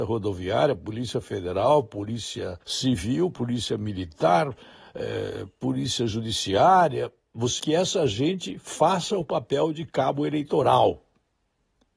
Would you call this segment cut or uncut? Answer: cut